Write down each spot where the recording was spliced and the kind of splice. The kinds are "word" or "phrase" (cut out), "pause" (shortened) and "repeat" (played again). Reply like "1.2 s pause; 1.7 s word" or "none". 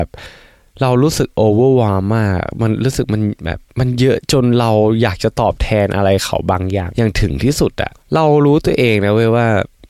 3.7 s pause